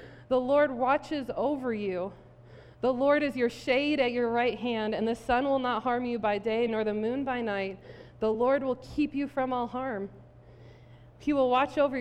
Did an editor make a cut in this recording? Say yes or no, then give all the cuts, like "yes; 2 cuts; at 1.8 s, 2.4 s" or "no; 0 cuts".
no; 0 cuts